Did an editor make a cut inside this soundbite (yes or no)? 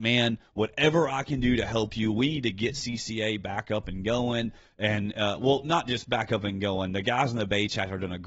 no